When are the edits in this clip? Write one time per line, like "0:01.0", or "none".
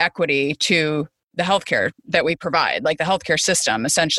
0:02.0